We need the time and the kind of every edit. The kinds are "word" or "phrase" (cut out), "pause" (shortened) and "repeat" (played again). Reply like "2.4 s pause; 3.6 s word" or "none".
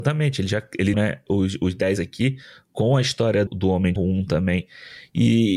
0.9 s word; 2.0 s word; 3.5 s word; 4.0 s word